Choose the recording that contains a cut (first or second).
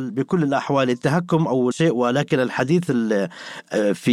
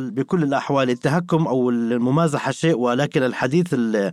first